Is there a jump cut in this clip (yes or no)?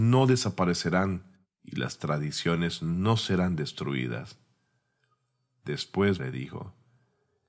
yes